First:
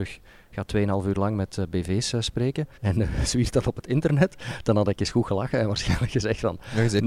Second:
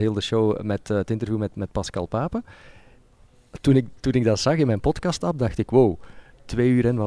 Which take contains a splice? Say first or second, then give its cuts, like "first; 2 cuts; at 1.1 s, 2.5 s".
first; 1 cut; at 2.8 s